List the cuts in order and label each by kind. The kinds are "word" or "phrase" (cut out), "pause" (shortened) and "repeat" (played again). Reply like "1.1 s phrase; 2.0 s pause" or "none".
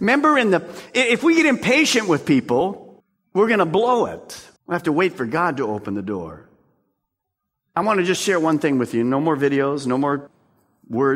3.0 s pause; 4.6 s pause